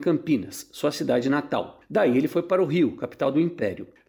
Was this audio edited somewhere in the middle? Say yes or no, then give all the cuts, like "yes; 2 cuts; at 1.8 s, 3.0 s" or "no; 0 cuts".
no; 0 cuts